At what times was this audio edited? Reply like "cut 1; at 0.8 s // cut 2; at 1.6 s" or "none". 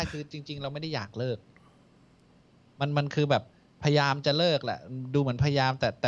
none